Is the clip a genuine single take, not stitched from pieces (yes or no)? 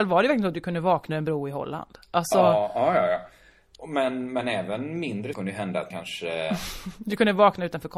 no